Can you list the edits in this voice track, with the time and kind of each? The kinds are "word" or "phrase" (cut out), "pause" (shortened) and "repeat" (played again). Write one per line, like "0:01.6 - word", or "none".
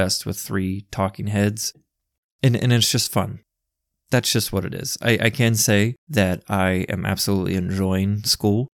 0:06.0 - pause